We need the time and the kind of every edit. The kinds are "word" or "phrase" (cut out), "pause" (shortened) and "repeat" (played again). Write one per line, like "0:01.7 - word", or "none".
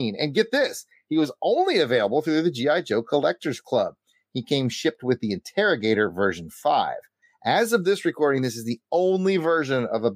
none